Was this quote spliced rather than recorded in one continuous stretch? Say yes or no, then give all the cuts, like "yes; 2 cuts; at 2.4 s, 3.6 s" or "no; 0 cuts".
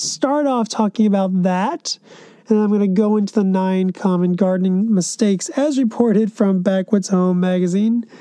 no; 0 cuts